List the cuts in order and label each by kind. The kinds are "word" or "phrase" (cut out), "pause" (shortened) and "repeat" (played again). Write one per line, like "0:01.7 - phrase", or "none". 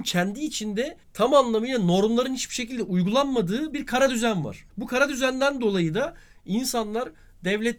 0:01.0 - pause
0:04.7 - pause